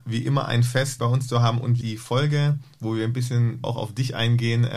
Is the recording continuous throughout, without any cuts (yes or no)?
no